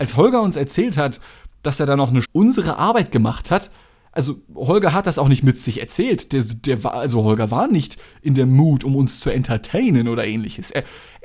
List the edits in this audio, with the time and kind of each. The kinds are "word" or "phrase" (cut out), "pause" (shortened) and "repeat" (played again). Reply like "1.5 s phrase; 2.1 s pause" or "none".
2.2 s phrase; 4.5 s pause

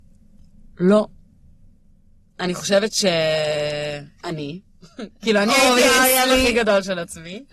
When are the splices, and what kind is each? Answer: none

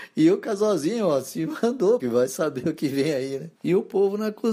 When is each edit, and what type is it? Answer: 2.0 s word; 3.6 s pause

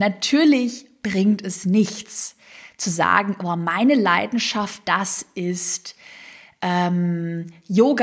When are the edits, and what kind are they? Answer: none

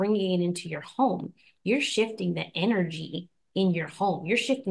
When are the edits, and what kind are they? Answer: none

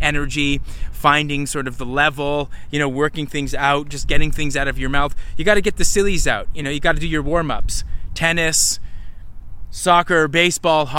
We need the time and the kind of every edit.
none

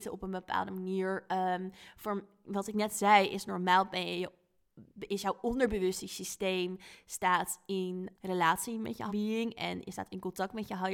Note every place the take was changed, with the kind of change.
8.1 s word; 9.1 s word

